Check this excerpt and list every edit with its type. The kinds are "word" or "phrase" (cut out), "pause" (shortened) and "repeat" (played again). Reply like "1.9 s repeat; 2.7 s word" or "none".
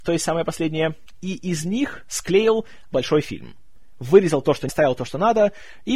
2.9 s word; 4.7 s word